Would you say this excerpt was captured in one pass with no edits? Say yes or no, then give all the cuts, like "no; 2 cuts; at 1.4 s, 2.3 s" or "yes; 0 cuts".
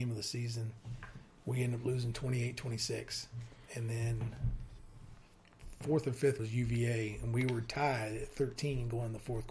no; 1 cut; at 6.4 s